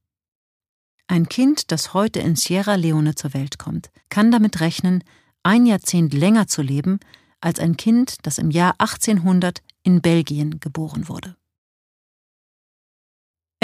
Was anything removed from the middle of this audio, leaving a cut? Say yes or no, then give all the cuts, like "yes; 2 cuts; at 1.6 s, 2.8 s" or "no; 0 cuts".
yes; 1 cut; at 4.0 s